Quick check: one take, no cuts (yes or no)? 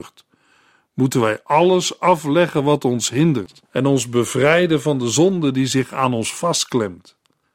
no